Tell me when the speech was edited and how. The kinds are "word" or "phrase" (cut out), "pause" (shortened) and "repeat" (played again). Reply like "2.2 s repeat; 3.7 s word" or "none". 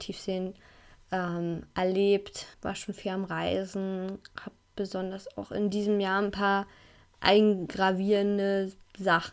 2.5 s pause